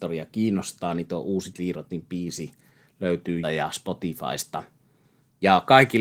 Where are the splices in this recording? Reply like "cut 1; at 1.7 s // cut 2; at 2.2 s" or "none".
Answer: cut 1; at 1.5 s // cut 2; at 3.4 s